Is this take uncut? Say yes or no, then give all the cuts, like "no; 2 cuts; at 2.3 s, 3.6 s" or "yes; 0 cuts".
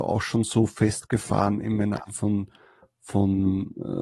no; 1 cut; at 2.0 s